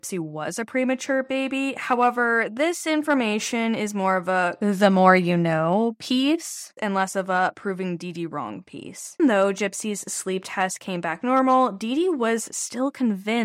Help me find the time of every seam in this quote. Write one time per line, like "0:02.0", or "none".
0:09.2